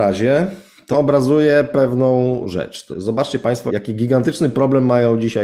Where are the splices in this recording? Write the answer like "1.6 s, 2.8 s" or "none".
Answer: 0.9 s, 2.4 s, 2.9 s, 3.7 s